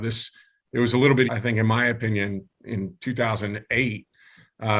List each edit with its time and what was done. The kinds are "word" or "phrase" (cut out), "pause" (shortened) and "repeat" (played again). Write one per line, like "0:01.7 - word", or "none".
0:01.3 - word